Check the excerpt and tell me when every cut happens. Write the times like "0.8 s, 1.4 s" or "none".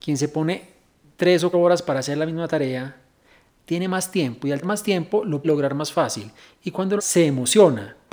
1.5 s, 4.6 s, 5.4 s, 7.0 s